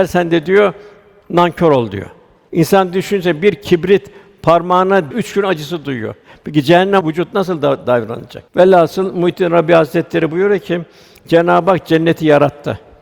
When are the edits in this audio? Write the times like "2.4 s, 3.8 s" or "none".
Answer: 5.1 s, 7.0 s